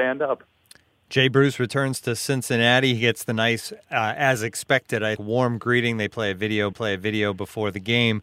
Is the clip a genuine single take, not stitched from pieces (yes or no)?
no